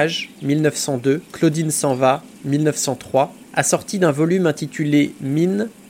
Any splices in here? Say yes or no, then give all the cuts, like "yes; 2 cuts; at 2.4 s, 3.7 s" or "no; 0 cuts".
yes; 2 cuts; at 1.3 s, 3.4 s